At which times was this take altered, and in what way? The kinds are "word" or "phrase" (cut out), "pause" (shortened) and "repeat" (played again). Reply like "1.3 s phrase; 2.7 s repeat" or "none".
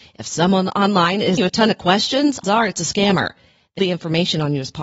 1.4 s word; 2.4 s word; 3.8 s phrase